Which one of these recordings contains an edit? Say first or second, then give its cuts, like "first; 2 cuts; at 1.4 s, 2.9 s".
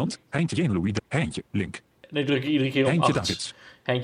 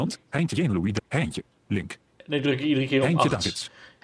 first; 1 cut; at 1.5 s